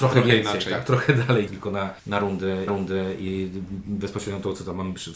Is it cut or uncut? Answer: cut